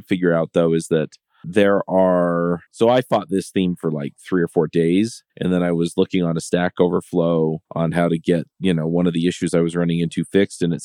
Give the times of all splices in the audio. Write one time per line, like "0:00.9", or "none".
0:02.7
0:05.3
0:07.6
0:08.5